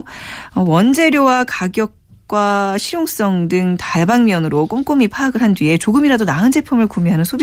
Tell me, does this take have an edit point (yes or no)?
no